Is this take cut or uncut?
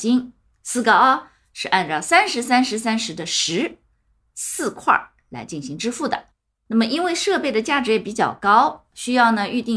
uncut